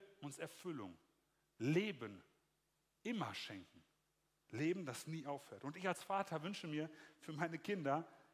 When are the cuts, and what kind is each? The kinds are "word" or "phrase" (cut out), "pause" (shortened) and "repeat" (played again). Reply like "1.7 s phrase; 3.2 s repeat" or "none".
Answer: none